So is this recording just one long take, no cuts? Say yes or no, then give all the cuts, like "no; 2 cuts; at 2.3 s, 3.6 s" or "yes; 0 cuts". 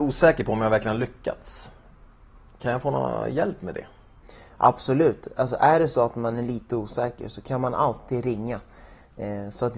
yes; 0 cuts